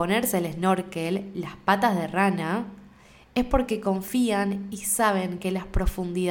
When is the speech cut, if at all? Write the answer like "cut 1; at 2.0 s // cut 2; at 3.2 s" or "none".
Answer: none